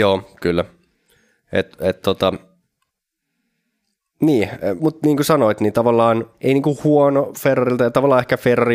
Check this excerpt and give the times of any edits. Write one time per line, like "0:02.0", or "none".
0:04.8
0:06.3
0:07.3